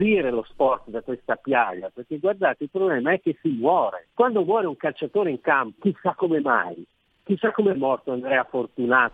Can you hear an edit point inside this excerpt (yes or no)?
yes